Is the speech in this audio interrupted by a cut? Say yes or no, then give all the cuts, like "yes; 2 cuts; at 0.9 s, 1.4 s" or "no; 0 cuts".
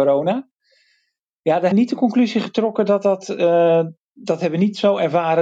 yes; 1 cut; at 1.7 s